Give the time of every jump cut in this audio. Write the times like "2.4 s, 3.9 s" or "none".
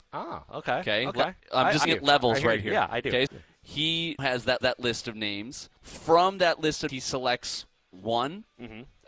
1.4 s, 1.8 s, 3.3 s, 4.2 s, 4.6 s, 5.8 s, 6.9 s